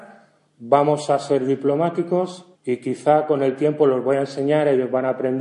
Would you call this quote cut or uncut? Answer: cut